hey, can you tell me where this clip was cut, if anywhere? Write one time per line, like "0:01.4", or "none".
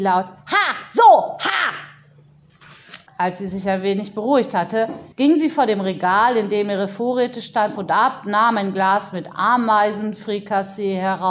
0:03.1
0:05.1
0:07.7